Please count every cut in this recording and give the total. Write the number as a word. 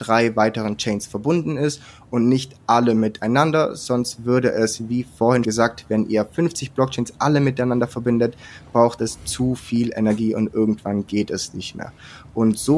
one